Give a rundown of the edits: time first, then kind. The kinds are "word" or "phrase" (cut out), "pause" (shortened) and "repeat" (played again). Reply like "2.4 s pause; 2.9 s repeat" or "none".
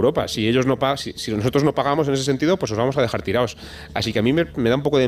none